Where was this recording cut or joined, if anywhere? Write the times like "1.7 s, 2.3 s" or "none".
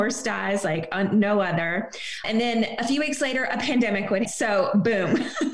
2.2 s, 4.2 s